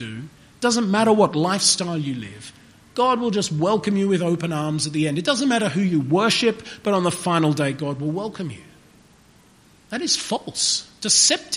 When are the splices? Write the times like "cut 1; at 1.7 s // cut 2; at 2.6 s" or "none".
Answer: none